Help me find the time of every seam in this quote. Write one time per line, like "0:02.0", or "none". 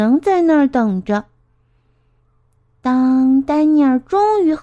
none